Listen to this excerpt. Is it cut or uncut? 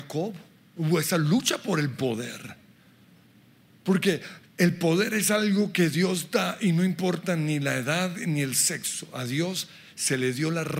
uncut